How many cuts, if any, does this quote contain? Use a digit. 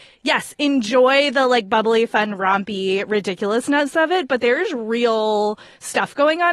0